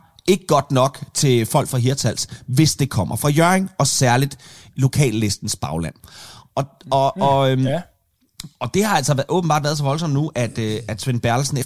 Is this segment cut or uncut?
uncut